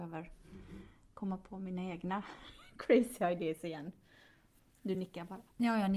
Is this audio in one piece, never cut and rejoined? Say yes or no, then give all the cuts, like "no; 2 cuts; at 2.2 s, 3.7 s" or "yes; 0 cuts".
yes; 0 cuts